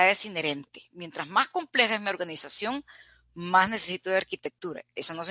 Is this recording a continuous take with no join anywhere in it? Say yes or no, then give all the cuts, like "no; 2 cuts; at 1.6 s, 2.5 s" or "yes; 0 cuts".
yes; 0 cuts